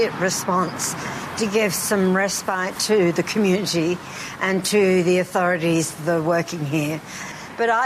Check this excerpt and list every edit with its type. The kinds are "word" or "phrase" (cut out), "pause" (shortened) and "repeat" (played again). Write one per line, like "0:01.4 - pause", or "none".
none